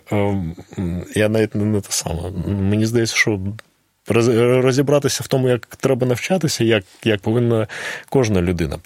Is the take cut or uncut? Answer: cut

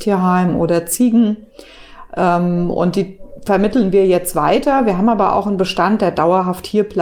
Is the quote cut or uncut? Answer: uncut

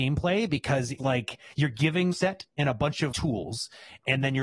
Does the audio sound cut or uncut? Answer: cut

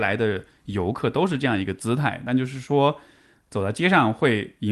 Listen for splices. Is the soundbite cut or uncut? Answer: uncut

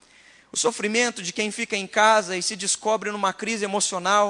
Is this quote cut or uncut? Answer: uncut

